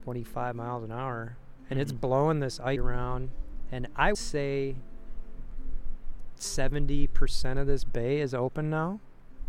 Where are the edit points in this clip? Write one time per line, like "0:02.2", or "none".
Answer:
0:02.8
0:04.1